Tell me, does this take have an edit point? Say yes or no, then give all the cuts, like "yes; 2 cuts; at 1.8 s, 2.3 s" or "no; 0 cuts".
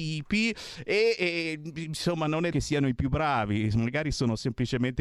yes; 2 cuts; at 1.2 s, 2.5 s